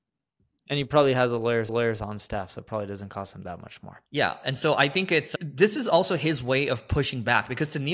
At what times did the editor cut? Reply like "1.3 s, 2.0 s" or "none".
1.7 s, 4.1 s